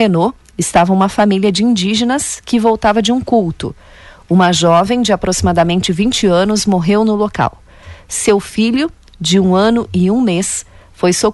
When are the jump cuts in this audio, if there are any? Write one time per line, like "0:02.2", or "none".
none